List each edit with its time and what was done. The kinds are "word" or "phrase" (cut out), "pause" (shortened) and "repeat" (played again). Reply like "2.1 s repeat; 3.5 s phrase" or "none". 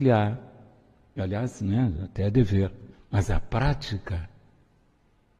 2.9 s pause